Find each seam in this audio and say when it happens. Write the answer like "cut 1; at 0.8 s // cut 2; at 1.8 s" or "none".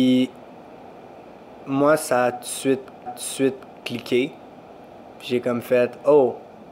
cut 1; at 3.1 s

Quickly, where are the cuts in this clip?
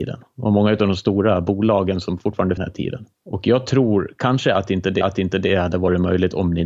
cut 1; at 2.6 s // cut 2; at 3.1 s // cut 3; at 5.0 s

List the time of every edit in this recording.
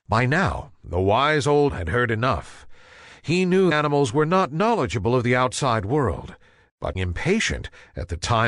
cut 1; at 1.7 s // cut 2; at 3.7 s // cut 3; at 6.9 s

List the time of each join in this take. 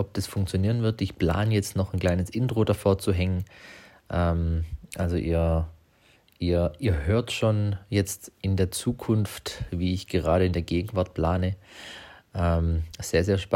none

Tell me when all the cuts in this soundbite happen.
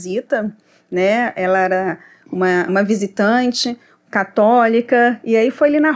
cut 1; at 2.7 s

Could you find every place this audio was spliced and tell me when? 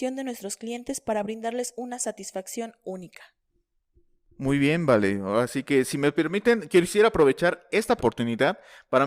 cut 1; at 8.0 s

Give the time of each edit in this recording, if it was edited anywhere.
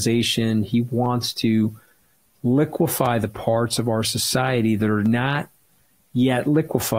none

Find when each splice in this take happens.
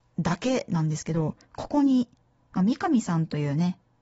cut 1; at 1.4 s

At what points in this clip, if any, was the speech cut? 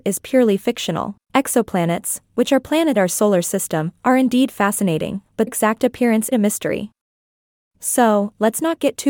cut 1; at 1.2 s // cut 2; at 2.9 s // cut 3; at 5.5 s // cut 4; at 6.3 s

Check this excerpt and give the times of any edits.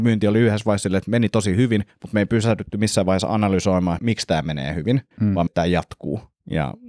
cut 1; at 1.9 s // cut 2; at 4.0 s // cut 3; at 5.1 s // cut 4; at 5.5 s

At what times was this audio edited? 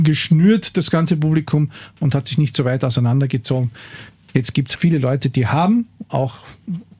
cut 1; at 4.7 s

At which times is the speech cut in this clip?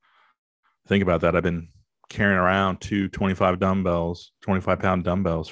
none

